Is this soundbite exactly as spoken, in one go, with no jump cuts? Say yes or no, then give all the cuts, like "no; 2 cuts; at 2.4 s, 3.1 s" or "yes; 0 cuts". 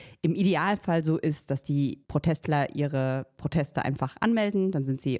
no; 1 cut; at 2.0 s